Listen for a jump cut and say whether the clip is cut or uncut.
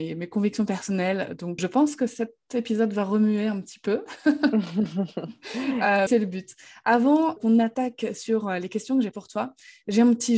cut